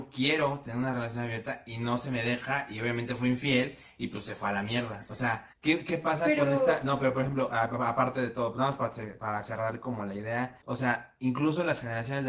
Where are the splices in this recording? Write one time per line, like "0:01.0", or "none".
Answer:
0:05.5
0:10.6